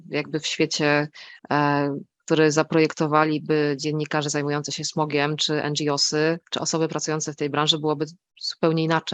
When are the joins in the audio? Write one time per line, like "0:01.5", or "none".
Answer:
0:01.4
0:06.4